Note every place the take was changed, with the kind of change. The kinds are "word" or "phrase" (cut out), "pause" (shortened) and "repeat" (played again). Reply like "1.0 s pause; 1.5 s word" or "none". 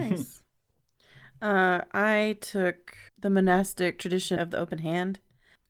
3.1 s pause; 4.4 s phrase